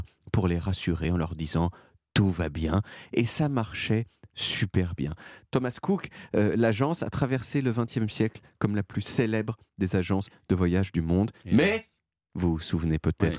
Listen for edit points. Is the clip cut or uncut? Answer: uncut